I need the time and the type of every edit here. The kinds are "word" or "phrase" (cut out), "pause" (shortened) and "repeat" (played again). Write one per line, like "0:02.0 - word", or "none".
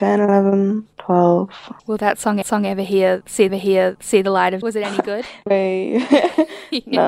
0:02.4 - repeat
0:03.5 - repeat
0:04.6 - word
0:05.5 - word